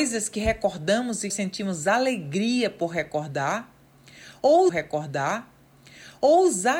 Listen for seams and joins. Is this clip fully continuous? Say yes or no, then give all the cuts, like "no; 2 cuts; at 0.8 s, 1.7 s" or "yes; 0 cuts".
no; 2 cuts; at 1.3 s, 4.7 s